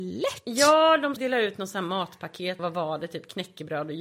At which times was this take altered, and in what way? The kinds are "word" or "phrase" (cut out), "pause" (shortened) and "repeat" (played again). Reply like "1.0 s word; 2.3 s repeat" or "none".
1.2 s word; 2.6 s word